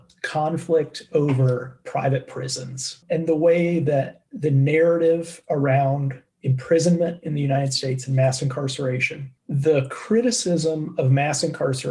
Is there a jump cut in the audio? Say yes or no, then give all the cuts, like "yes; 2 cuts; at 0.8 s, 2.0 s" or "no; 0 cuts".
yes; 1 cut; at 9.4 s